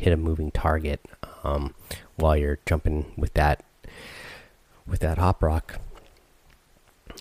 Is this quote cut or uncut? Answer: uncut